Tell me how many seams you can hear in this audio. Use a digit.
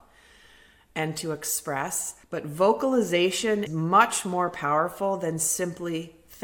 2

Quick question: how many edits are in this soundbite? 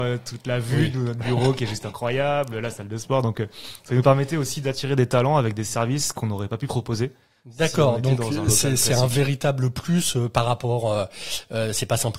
0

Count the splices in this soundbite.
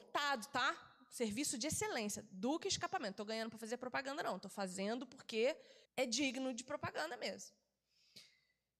1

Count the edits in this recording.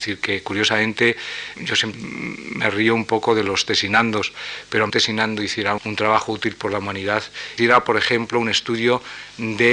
5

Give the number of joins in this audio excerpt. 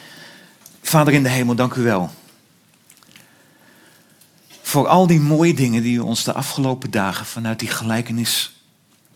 0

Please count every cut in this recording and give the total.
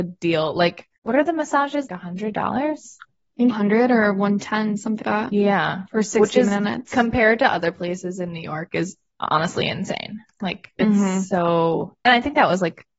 5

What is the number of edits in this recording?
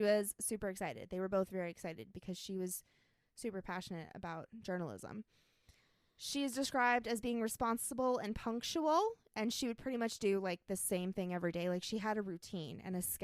0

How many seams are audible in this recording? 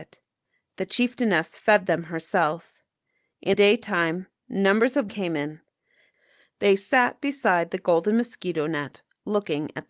2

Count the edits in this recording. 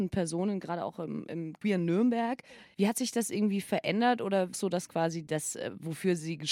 1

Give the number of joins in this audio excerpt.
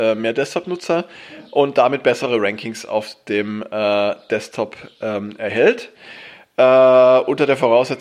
0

